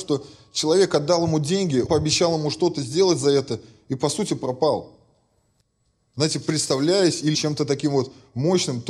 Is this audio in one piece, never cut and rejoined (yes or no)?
no